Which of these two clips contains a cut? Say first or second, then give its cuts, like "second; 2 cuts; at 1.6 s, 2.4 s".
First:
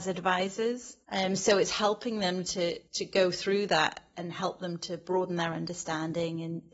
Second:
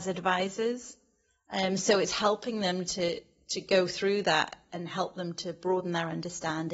first; 2 cuts; at 1.0 s, 2.9 s